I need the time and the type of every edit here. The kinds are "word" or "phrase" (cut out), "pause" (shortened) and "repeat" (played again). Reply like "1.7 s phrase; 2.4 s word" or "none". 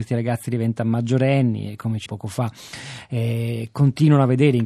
2.1 s phrase